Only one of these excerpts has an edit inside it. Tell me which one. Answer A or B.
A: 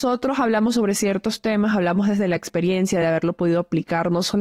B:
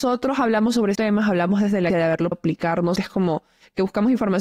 B